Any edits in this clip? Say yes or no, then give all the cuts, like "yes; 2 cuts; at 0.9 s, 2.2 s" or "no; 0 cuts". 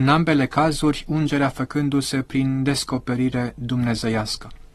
no; 0 cuts